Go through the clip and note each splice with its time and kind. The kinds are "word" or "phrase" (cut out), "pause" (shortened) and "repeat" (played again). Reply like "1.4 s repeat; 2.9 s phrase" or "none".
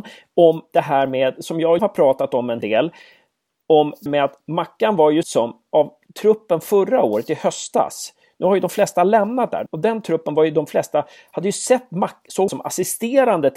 1.8 s word; 2.6 s word; 4.1 s word; 5.2 s word; 9.7 s word; 12.5 s word